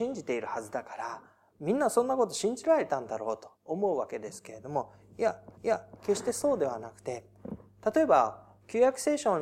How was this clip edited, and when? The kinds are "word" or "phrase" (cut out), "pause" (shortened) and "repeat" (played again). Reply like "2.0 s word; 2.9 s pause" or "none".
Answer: 3.5 s pause; 5.5 s repeat